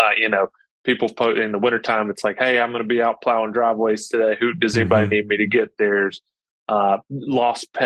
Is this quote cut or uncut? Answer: uncut